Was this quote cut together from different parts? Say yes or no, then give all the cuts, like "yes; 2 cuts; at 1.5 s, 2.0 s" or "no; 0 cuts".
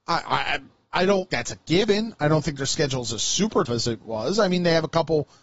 yes; 2 cuts; at 1.3 s, 3.7 s